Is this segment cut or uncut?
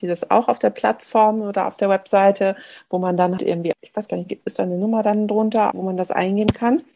cut